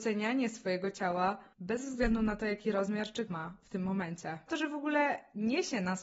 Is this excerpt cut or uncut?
cut